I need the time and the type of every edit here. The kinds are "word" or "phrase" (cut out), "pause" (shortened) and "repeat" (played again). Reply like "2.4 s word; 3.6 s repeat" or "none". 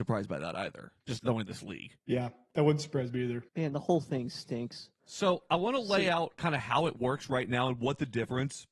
1.0 s pause; 2.0 s pause; 3.5 s pause

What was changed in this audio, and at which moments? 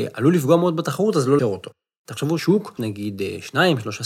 1.4 s word; 2.4 s word; 2.8 s word

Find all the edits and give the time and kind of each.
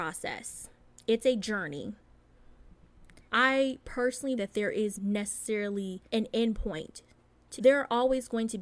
3.3 s pause; 4.4 s word; 5.0 s word; 6.1 s pause; 7.6 s phrase

